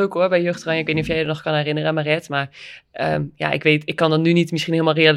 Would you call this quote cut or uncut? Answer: uncut